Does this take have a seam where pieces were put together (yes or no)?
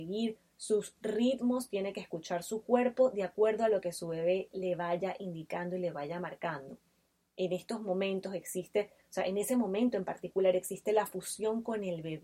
no